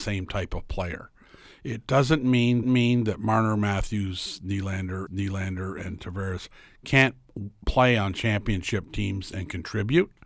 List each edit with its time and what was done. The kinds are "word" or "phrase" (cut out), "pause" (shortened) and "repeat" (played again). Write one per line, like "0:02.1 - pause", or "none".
0:02.6 - repeat
0:05.1 - repeat